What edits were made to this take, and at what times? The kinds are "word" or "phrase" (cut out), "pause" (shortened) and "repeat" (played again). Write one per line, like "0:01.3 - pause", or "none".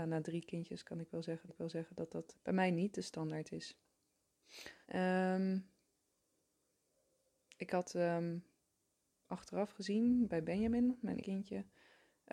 0:01.5 - repeat
0:02.3 - word
0:04.8 - pause
0:11.2 - word